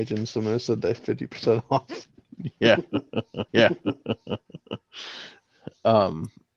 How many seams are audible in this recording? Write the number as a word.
one